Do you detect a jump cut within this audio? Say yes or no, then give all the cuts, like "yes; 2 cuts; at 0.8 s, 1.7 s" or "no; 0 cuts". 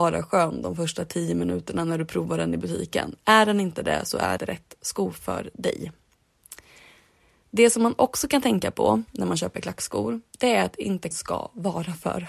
yes; 2 cuts; at 4.4 s, 11.1 s